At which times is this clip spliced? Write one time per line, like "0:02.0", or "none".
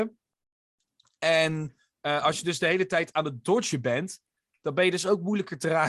none